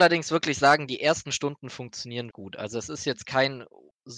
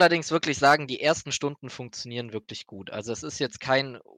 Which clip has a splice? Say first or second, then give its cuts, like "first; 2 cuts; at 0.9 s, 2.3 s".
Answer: first; 1 cut; at 2.3 s